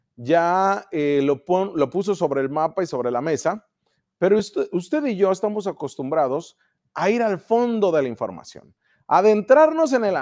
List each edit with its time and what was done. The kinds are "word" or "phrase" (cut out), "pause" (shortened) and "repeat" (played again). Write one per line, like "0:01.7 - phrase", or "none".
none